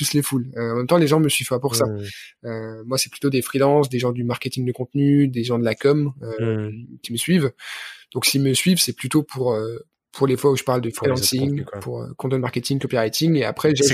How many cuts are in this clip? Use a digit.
0